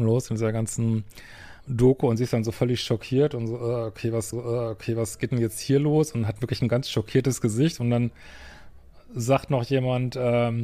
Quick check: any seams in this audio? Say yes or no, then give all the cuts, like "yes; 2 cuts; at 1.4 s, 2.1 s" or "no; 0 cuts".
yes; 2 cuts; at 1.6 s, 4.3 s